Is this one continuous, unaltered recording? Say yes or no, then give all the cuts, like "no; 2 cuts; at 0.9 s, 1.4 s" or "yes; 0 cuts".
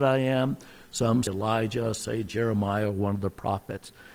no; 2 cuts; at 1.3 s, 2.0 s